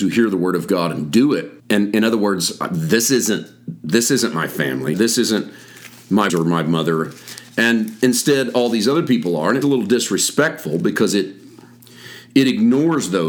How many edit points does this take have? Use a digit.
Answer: 4